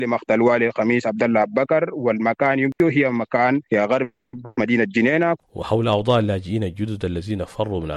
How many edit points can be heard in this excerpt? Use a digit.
1